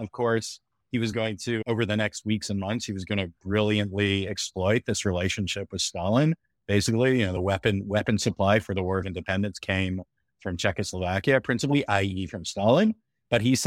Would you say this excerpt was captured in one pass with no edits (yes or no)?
yes